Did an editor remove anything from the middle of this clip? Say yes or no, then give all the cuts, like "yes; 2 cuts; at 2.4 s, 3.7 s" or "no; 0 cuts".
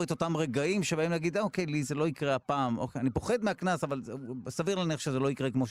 no; 0 cuts